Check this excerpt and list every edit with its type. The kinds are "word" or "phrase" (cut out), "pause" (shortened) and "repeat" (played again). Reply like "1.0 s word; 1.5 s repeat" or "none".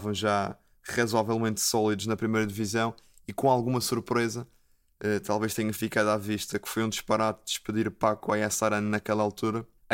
none

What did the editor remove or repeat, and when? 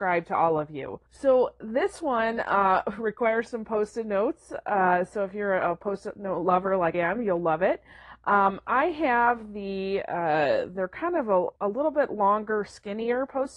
1.1 s pause; 6.9 s word; 11.6 s pause

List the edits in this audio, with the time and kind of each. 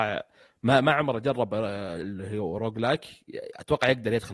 none

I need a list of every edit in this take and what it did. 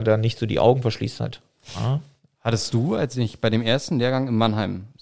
none

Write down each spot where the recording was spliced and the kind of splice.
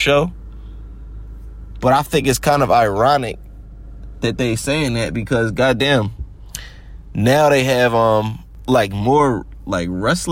none

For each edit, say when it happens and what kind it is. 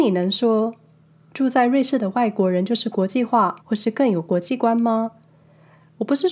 3.6 s pause

